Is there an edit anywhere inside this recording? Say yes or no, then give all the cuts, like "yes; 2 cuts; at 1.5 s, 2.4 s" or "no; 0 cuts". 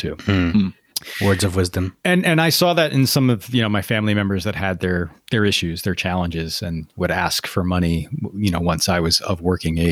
yes; 2 cuts; at 2.0 s, 5.2 s